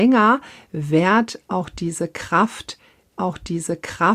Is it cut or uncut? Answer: cut